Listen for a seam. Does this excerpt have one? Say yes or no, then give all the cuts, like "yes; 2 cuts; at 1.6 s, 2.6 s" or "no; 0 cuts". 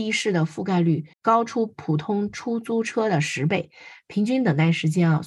yes; 1 cut; at 1.1 s